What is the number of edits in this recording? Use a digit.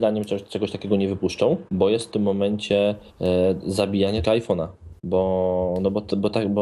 5